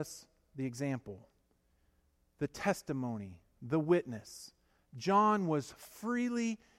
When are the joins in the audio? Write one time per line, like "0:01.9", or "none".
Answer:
none